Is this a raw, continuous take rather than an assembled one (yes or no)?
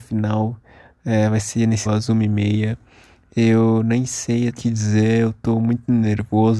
no